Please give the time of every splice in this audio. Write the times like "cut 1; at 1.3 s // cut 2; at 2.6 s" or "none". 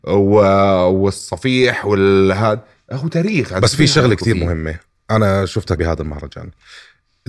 cut 1; at 5.8 s